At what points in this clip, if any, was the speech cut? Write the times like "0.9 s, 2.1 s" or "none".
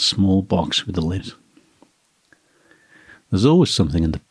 1.2 s